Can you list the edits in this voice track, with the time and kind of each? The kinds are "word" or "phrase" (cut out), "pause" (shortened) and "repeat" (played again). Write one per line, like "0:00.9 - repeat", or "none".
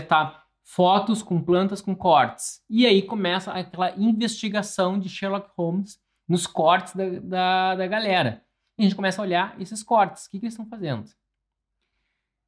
none